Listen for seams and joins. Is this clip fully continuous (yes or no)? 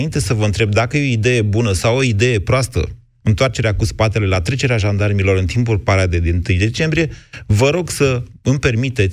yes